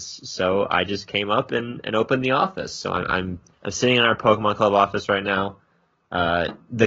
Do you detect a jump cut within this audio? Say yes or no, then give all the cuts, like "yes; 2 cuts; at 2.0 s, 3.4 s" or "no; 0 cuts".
yes; 1 cut; at 3.5 s